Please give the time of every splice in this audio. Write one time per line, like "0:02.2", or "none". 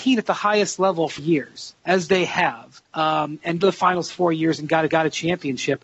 0:01.2
0:01.8
0:02.8
0:03.6
0:04.9